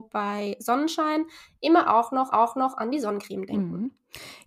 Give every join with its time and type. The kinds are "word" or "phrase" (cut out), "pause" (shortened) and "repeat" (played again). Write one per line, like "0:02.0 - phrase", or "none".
0:02.3 - repeat